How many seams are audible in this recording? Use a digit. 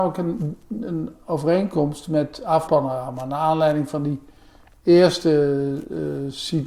1